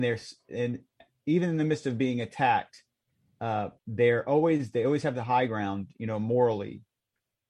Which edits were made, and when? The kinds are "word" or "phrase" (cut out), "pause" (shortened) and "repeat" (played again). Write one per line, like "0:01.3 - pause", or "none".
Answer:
0:03.8 - pause